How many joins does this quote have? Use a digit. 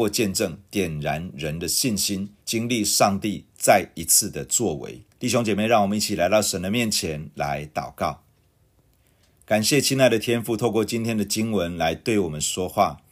2